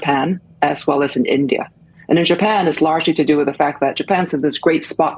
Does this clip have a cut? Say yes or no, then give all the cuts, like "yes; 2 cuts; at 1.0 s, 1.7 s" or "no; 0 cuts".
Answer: no; 0 cuts